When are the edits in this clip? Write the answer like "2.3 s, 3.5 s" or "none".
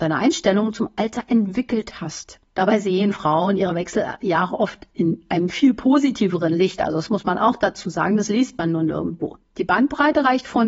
2.5 s